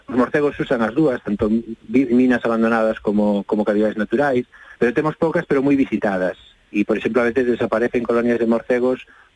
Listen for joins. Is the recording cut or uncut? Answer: cut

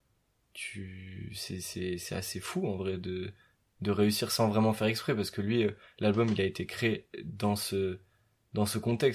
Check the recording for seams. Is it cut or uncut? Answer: uncut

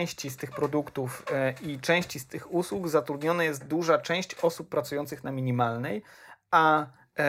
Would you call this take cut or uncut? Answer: uncut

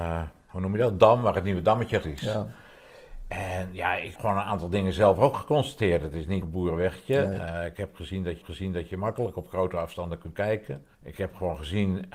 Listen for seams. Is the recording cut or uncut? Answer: cut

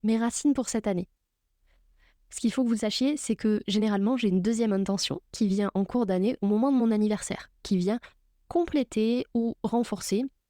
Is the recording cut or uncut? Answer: uncut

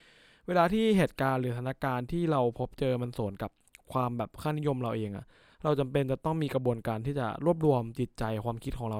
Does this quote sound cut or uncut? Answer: uncut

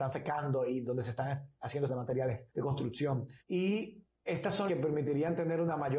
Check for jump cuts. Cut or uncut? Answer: cut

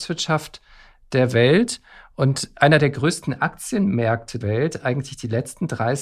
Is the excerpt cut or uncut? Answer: cut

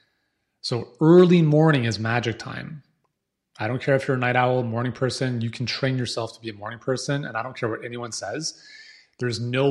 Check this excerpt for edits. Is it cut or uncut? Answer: uncut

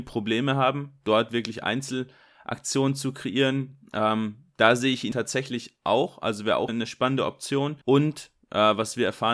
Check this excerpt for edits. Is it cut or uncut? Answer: cut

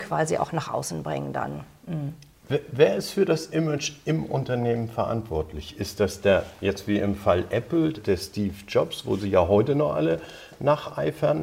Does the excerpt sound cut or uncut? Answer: cut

